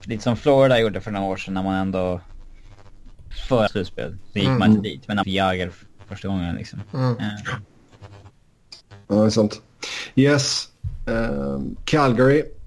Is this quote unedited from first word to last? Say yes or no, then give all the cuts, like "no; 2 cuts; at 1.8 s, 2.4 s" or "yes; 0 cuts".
no; 3 cuts; at 3.3 s, 3.7 s, 5.2 s